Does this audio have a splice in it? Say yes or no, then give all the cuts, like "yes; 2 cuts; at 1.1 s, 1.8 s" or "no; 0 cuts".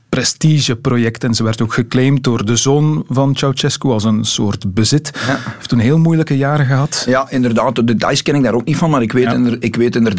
no; 0 cuts